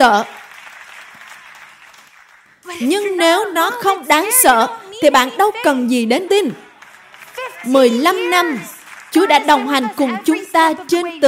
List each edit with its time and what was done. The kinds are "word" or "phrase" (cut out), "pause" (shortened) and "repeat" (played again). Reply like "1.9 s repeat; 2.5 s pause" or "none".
6.3 s word